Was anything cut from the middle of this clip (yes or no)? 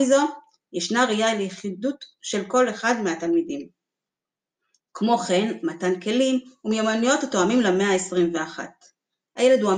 no